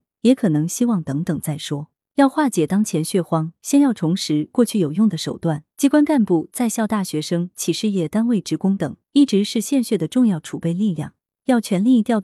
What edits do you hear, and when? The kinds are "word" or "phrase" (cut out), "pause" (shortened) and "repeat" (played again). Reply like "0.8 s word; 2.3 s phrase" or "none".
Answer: 5.7 s pause; 7.5 s phrase; 9.0 s pause